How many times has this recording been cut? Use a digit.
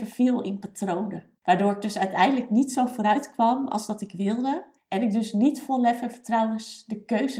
2